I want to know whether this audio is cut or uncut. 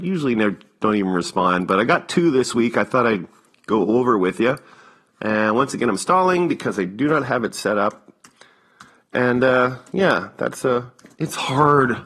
uncut